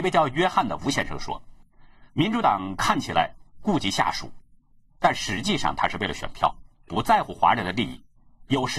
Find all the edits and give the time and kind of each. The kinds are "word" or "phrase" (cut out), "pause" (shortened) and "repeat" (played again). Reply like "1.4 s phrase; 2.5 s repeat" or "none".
2.1 s pause

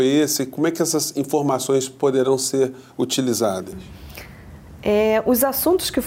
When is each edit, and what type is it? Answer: none

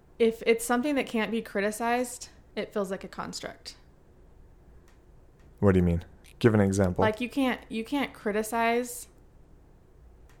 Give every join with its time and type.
none

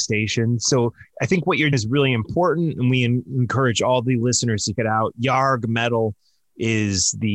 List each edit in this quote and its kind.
1.1 s pause; 1.7 s word; 4.8 s word

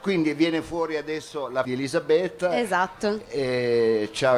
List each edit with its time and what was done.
1.6 s phrase

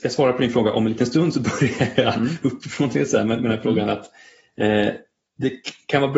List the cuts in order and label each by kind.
none

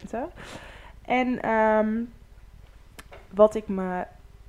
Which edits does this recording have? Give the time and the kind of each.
none

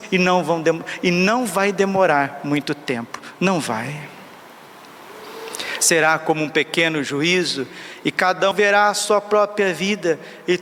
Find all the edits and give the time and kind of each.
8.5 s word

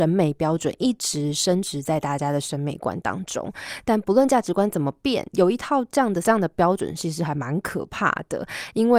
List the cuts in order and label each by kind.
6.2 s word

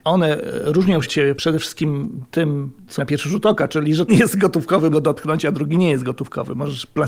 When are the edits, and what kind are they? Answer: 1.0 s word; 3.0 s word; 4.1 s word; 4.9 s word

